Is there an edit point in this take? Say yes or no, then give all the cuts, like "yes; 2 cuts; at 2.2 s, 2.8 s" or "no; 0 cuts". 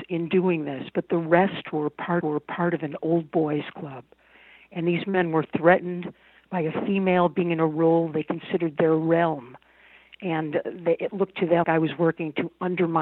yes; 2 cuts; at 2.2 s, 11.6 s